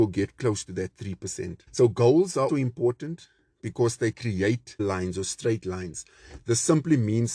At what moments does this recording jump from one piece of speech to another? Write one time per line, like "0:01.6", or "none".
0:01.7
0:02.5
0:04.8

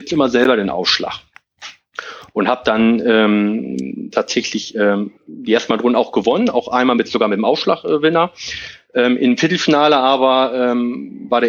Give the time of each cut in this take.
0:05.2

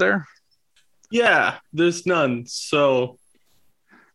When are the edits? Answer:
none

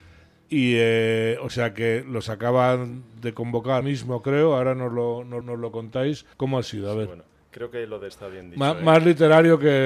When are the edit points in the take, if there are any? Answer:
0:03.8
0:05.4
0:06.3
0:08.1

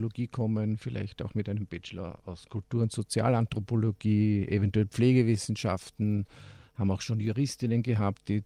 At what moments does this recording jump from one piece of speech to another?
none

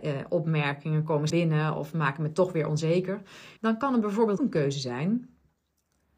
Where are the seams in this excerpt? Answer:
0:01.3
0:03.6
0:04.4

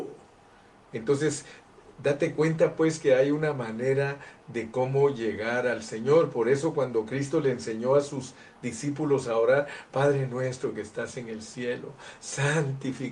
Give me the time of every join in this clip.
none

